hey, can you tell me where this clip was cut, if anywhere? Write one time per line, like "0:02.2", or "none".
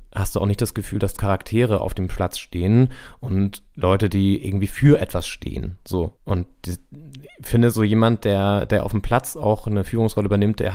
0:01.2
0:06.2